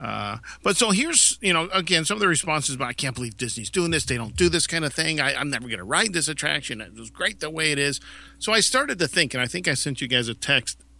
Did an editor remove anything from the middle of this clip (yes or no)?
no